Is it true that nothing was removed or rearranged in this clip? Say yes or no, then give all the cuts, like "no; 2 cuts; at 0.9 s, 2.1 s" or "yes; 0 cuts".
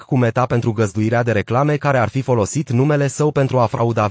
yes; 0 cuts